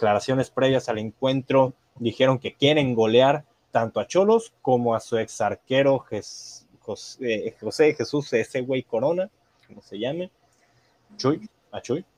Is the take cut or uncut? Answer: uncut